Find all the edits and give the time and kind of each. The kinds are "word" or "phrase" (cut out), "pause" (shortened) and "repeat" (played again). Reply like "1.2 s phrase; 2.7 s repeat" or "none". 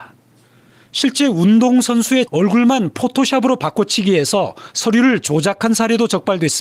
2.3 s word